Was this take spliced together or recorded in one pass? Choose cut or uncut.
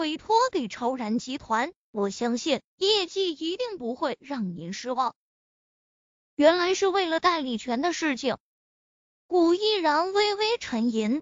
uncut